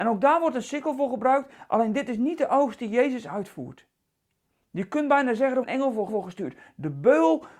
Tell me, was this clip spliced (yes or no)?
yes